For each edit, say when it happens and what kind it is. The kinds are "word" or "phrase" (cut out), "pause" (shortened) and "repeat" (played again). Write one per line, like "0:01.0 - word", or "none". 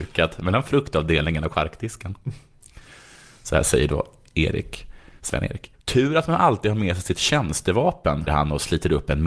0:05.7 - pause
0:08.3 - word